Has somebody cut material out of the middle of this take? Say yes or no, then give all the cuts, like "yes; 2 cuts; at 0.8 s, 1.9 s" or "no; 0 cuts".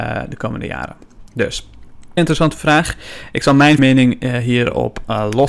yes; 2 cuts; at 2.2 s, 3.8 s